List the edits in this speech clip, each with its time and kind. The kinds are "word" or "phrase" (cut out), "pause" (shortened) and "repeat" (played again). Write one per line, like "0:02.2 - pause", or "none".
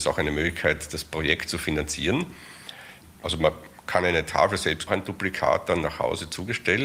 0:03.2 - pause
0:04.9 - phrase

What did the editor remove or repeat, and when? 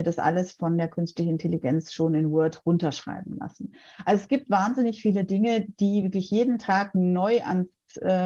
none

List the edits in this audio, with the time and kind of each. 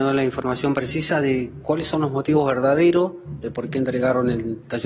none

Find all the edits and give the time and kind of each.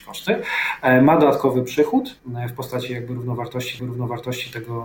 0:02.2 - pause
0:03.8 - repeat

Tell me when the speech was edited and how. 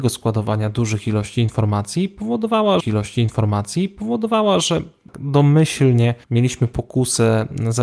0:02.8 - repeat
0:06.2 - pause

